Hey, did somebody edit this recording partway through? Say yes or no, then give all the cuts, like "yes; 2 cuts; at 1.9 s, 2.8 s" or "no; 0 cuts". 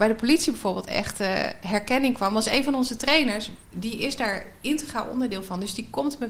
yes; 1 cut; at 3.6 s